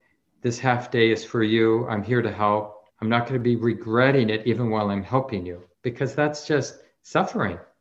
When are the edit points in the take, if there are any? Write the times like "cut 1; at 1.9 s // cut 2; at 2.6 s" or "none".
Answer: cut 1; at 2.9 s // cut 2; at 5.7 s

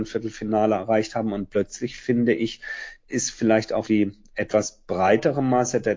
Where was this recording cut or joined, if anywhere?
cut 1; at 3.8 s

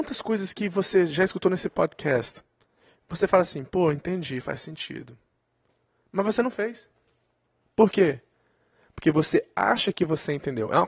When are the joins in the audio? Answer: none

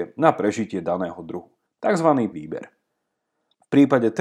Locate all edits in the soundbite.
cut 1; at 2.3 s

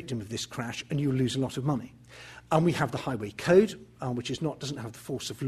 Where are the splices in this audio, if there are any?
none

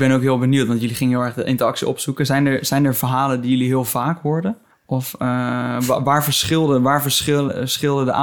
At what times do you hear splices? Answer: cut 1; at 4.7 s

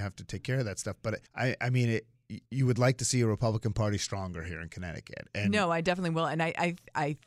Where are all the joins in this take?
cut 1; at 1.3 s // cut 2; at 2.5 s

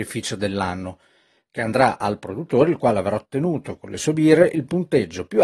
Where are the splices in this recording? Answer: none

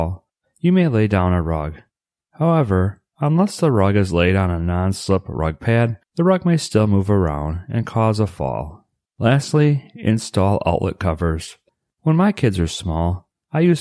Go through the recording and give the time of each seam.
cut 1; at 3.1 s // cut 2; at 6.0 s // cut 3; at 9.0 s

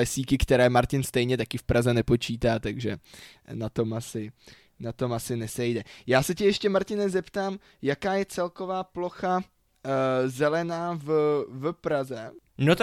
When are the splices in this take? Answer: none

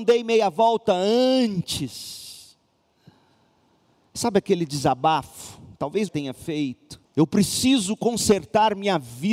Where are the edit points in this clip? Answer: cut 1; at 6.1 s // cut 2; at 7.1 s

